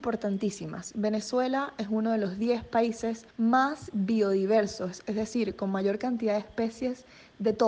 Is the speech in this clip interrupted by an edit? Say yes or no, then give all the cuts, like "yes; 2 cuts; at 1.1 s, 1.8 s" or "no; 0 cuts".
yes; 1 cut; at 3.3 s